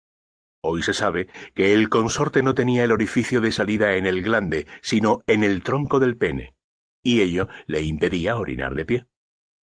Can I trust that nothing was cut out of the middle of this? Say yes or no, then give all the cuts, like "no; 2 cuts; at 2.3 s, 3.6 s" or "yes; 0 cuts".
yes; 0 cuts